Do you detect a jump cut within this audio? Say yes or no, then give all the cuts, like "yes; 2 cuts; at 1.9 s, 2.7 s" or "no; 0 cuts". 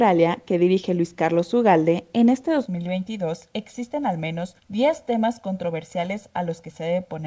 yes; 1 cut; at 4.6 s